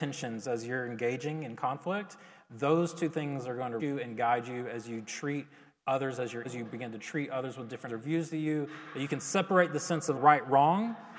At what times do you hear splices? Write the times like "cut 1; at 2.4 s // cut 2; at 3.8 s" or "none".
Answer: cut 1; at 3.8 s // cut 2; at 6.4 s // cut 3; at 7.9 s // cut 4; at 10.1 s